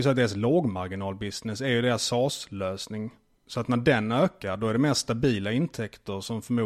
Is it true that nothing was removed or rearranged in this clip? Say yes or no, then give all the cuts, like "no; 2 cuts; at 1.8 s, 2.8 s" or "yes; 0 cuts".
yes; 0 cuts